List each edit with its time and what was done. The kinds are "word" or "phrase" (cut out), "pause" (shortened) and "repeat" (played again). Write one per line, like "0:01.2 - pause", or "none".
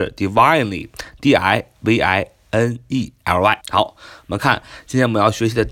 0:03.6 - pause